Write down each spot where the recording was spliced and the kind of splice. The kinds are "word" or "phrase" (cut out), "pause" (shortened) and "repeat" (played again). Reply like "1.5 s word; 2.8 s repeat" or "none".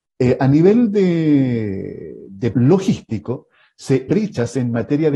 2.5 s phrase; 4.1 s word

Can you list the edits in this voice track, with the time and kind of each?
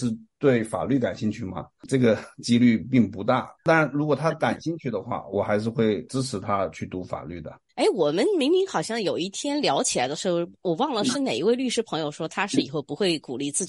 3.6 s pause; 7.7 s pause

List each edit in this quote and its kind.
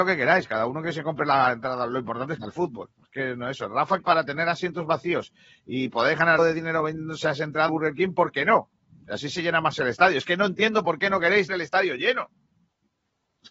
2.4 s phrase; 2.9 s pause; 4.0 s phrase; 6.4 s word; 7.7 s word; 11.5 s word

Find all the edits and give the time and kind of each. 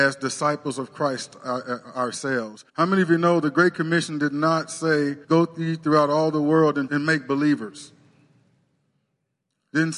2.7 s pause; 5.2 s pause; 6.9 s word

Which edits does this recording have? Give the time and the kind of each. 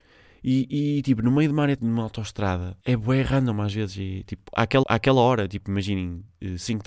1.8 s word; 2.8 s pause; 4.8 s repeat

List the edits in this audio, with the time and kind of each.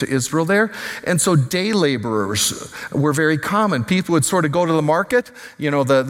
none

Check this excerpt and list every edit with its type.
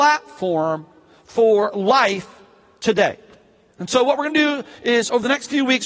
none

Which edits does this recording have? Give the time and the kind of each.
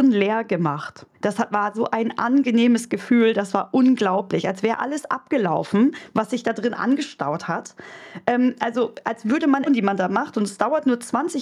1.1 s pause; 9.7 s phrase

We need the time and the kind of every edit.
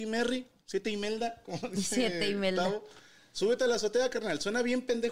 none

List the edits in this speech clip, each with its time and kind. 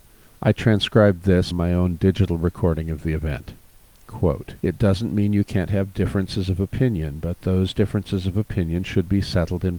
1.5 s word; 4.6 s pause

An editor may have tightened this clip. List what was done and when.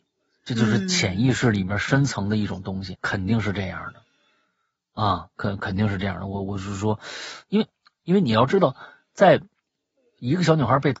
2.9 s word

